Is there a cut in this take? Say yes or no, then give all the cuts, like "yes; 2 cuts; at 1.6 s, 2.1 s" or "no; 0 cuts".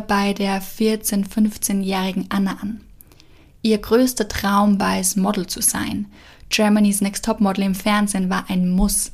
no; 0 cuts